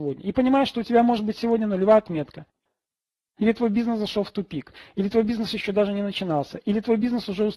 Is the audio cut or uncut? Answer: uncut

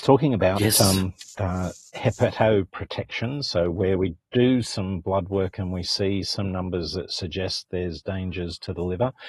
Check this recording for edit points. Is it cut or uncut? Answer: uncut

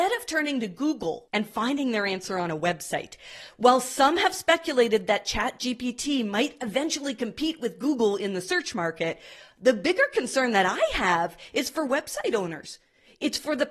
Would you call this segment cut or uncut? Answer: uncut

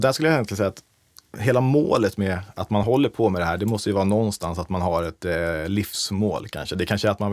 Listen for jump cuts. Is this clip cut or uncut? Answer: uncut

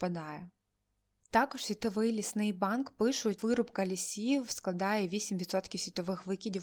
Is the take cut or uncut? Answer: cut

